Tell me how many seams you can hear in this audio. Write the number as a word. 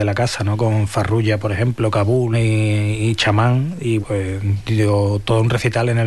two